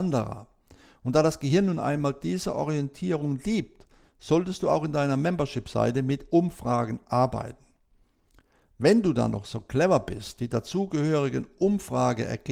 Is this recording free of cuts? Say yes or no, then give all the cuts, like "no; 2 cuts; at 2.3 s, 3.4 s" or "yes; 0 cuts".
yes; 0 cuts